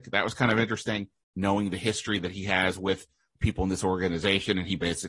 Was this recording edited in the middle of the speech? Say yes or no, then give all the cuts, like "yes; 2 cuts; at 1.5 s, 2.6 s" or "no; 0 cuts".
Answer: no; 0 cuts